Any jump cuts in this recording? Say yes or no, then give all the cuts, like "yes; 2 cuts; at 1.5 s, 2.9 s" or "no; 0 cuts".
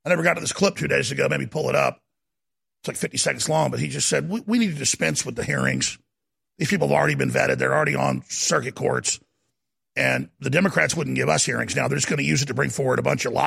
no; 0 cuts